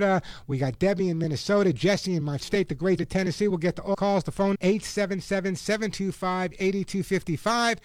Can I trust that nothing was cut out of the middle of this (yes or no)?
no